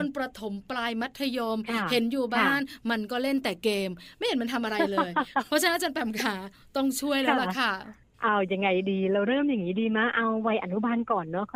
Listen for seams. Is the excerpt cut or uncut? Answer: uncut